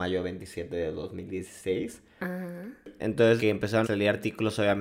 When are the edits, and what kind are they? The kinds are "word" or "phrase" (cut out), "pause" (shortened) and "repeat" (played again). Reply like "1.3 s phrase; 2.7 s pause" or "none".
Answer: 3.4 s word; 3.8 s word